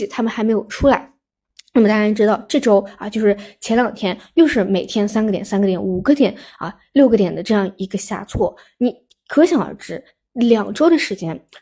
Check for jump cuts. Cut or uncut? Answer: uncut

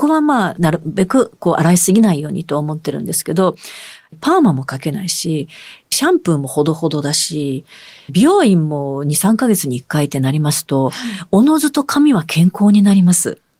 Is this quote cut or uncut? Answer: cut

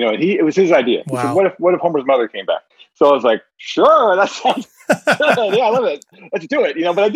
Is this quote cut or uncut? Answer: uncut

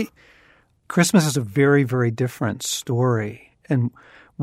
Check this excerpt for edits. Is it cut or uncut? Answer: uncut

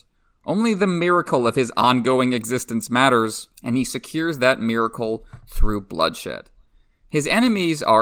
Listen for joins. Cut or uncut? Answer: cut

